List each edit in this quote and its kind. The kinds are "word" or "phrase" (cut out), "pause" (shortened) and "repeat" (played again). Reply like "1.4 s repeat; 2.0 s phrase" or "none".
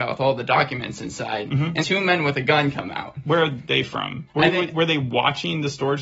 1.8 s word